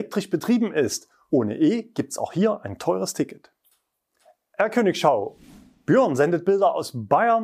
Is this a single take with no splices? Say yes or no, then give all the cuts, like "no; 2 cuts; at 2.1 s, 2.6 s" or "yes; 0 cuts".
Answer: yes; 0 cuts